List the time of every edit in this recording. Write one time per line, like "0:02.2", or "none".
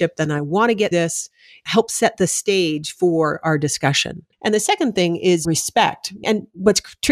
0:00.9
0:04.3
0:05.4